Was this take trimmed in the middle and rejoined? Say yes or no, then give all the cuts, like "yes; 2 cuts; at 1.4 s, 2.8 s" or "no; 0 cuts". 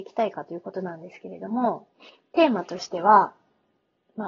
no; 0 cuts